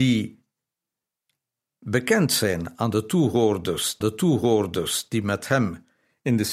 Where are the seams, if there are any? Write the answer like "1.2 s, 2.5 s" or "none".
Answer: 4.0 s